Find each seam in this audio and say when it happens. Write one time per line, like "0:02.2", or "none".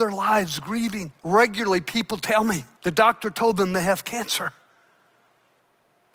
0:01.2
0:02.8